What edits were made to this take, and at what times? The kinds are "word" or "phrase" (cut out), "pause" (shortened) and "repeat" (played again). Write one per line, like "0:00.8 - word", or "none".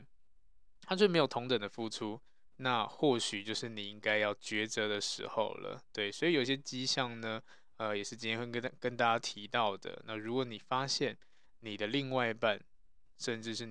none